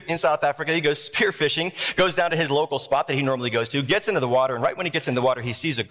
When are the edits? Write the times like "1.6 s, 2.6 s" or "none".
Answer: none